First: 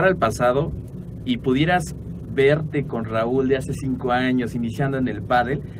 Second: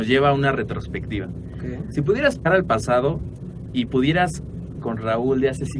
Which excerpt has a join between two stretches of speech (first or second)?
second